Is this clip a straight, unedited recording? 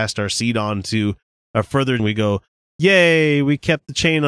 no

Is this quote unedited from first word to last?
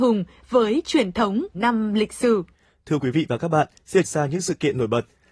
no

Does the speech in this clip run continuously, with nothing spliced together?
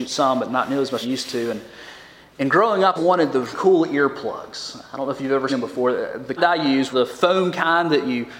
no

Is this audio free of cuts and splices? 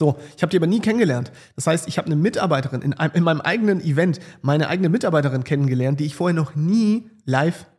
yes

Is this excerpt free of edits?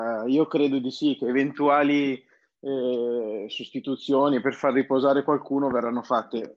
yes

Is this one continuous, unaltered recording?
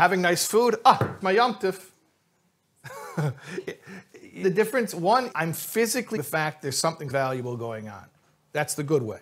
no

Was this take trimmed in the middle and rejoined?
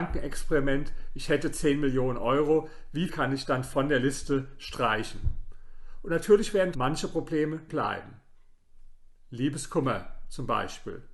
yes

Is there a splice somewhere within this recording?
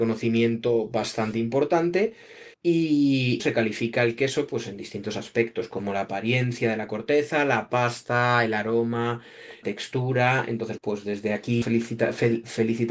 yes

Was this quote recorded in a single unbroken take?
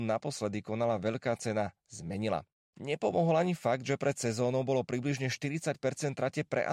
no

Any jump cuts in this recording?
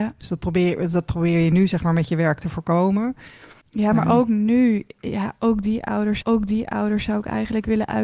yes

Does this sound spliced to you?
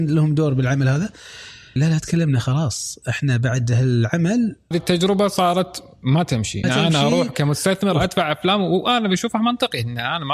yes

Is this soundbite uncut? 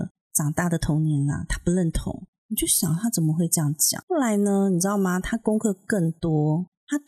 no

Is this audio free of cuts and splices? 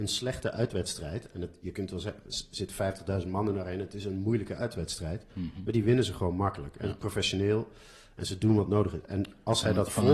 yes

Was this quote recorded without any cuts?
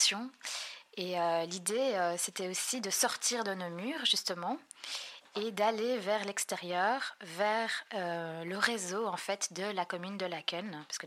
yes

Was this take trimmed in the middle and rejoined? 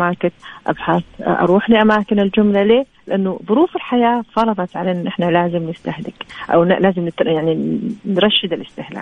yes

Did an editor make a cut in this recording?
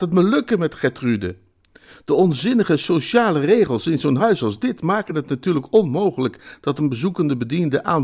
no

